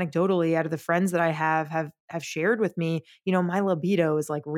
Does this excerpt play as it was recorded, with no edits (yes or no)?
yes